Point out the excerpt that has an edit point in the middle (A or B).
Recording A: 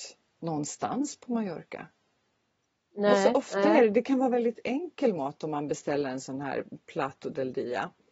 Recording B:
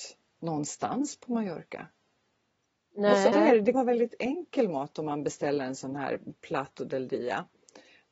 B